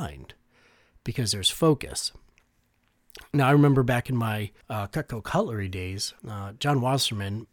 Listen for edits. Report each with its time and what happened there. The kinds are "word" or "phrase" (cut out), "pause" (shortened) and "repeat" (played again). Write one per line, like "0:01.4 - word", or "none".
0:04.6 - pause
0:06.2 - pause